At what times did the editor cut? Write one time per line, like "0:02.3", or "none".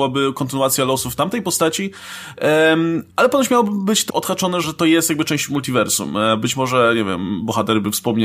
0:03.1
0:04.1
0:04.6